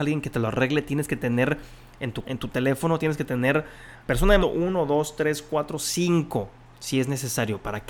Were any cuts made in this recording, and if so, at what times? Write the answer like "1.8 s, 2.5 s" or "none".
2.2 s, 4.0 s, 4.4 s